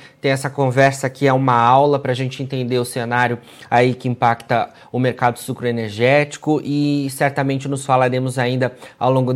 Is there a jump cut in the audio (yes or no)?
no